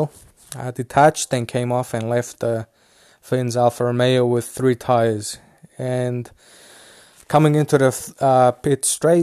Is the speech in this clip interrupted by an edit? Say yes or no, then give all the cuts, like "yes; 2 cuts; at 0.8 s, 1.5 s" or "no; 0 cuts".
no; 0 cuts